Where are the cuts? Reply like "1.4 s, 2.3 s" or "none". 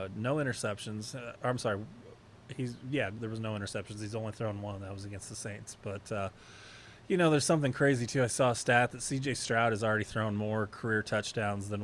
none